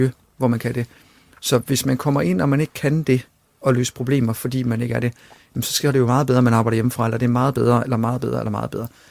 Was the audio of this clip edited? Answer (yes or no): no